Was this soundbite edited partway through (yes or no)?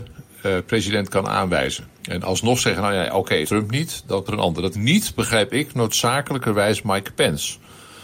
yes